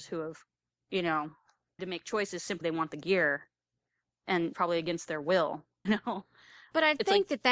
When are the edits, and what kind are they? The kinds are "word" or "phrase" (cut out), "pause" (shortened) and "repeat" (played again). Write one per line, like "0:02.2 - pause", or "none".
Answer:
0:01.8 - word
0:02.6 - word
0:04.5 - word
0:05.9 - word